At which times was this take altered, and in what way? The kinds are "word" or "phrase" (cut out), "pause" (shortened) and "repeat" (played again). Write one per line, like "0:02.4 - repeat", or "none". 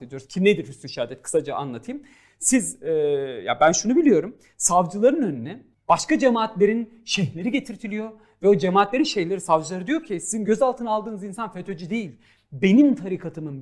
none

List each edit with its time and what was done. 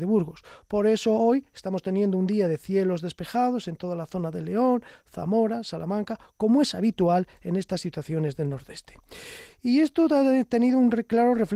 none

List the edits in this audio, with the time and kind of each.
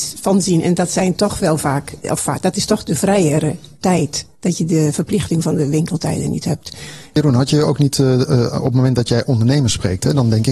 none

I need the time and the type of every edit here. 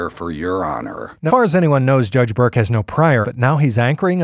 0:01.3 - word
0:03.2 - phrase

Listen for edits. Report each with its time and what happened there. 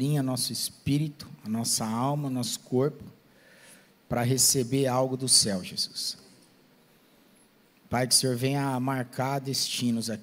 none

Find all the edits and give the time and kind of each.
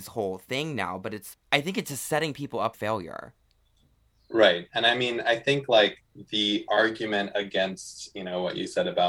0:01.3 - word
0:02.7 - word

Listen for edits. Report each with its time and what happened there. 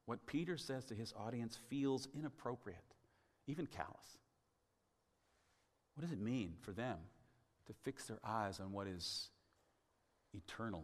none

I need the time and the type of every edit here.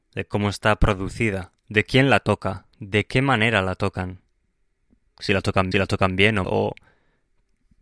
0:01.6 - pause
0:02.7 - pause
0:05.7 - repeat
0:06.4 - word

